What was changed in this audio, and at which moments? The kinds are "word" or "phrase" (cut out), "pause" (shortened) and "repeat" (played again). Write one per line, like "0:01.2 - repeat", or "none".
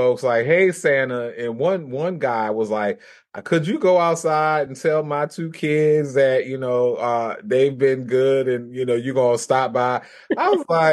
none